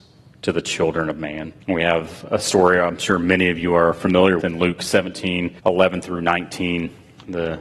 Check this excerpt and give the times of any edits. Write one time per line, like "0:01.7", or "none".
0:01.6
0:04.4
0:05.6